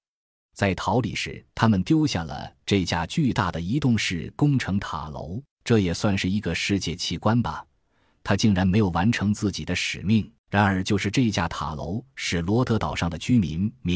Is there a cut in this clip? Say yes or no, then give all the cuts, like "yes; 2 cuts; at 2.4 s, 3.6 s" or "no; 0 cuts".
yes; 3 cuts; at 1.5 s, 5.5 s, 10.4 s